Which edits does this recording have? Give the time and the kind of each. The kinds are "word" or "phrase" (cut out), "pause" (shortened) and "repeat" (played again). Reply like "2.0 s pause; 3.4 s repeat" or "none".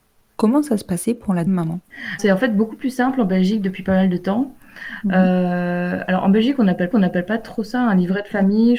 1.5 s word; 2.2 s word; 6.9 s repeat